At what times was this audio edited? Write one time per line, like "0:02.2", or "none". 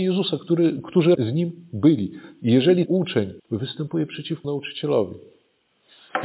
0:01.1
0:02.9
0:03.4
0:04.4